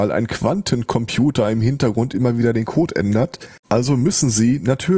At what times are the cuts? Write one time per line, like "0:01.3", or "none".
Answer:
0:03.6